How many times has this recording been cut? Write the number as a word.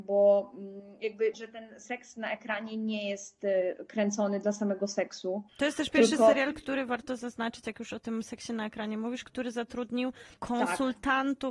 three